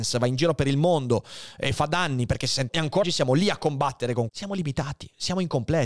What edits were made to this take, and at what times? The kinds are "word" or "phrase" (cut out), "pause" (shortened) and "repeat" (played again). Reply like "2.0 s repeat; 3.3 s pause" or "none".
2.7 s word; 3.0 s word; 4.3 s word